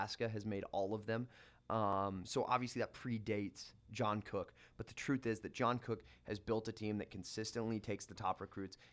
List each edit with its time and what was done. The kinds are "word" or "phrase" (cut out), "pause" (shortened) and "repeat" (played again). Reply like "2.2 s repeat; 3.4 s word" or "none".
none